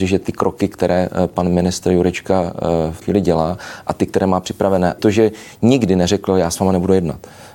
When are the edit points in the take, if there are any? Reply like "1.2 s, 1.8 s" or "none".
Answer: 3.0 s, 5.0 s